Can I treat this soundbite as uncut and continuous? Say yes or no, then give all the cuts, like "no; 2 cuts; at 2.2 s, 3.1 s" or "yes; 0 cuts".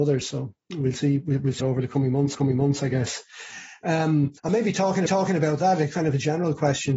no; 4 cuts; at 1.6 s, 2.3 s, 4.4 s, 5.1 s